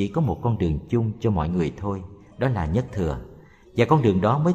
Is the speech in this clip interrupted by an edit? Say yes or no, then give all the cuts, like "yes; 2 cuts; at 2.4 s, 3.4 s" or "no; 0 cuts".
no; 0 cuts